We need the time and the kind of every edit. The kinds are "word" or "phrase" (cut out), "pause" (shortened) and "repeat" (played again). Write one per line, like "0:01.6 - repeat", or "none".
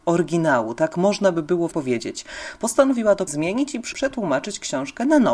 0:01.7 - word
0:03.3 - word
0:03.9 - word